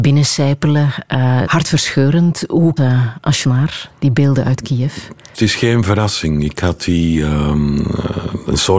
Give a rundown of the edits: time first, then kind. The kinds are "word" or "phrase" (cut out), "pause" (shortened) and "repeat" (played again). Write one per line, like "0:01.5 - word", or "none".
0:01.5 - word
0:02.8 - phrase
0:03.4 - word
0:05.3 - phrase